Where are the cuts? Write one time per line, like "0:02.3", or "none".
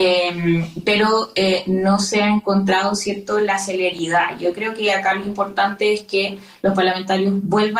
none